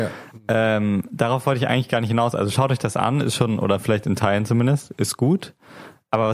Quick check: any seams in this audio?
no; 0 cuts

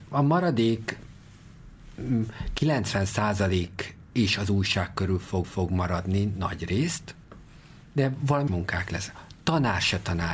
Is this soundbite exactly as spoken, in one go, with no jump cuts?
no; 2 cuts; at 5.4 s, 8.5 s

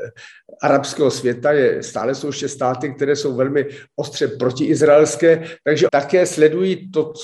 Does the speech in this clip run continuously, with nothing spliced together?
no; 1 cut; at 5.9 s

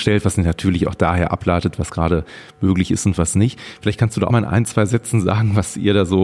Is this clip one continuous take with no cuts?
no; 1 cut; at 4.3 s

